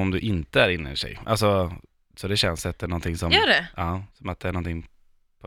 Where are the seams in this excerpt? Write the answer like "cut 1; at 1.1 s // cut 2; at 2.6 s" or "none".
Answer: cut 1; at 4.1 s